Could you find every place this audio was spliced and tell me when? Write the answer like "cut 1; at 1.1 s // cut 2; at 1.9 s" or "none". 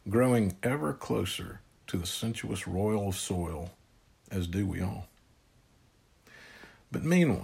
none